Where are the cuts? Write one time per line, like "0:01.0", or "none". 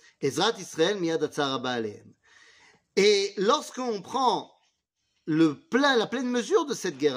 none